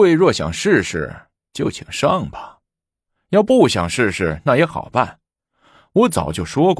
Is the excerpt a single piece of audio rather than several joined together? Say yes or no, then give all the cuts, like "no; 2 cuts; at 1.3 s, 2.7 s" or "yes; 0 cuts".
yes; 0 cuts